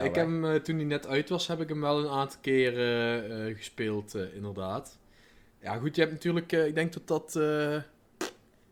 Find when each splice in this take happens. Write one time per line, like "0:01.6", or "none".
none